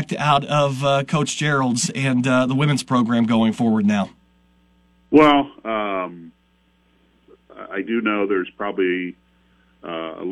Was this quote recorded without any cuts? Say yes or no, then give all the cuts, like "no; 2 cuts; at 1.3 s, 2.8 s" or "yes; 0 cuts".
yes; 0 cuts